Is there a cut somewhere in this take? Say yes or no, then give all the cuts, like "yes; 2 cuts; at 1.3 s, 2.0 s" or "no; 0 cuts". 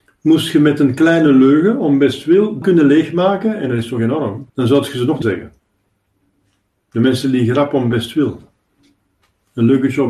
yes; 3 cuts; at 2.6 s, 4.5 s, 5.2 s